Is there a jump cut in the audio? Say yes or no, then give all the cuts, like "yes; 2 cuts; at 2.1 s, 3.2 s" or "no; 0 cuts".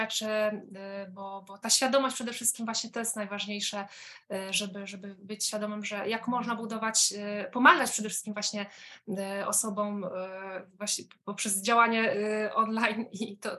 no; 0 cuts